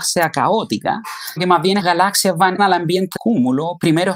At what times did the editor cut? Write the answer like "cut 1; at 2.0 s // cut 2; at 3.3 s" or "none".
cut 1; at 1.4 s // cut 2; at 1.8 s // cut 3; at 2.6 s // cut 4; at 3.2 s